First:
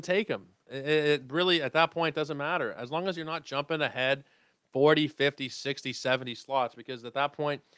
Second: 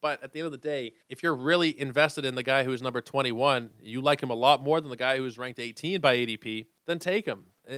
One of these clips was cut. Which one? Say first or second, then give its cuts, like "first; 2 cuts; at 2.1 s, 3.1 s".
second; 2 cuts; at 1.0 s, 6.8 s